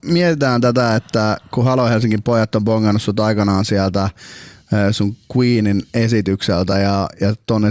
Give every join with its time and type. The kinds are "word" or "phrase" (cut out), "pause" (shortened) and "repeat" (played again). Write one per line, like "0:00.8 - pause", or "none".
none